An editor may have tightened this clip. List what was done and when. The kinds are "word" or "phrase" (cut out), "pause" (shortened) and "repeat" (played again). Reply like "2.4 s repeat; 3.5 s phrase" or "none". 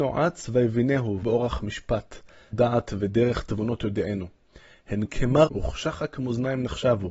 1.2 s word; 2.5 s word; 5.0 s word; 5.5 s word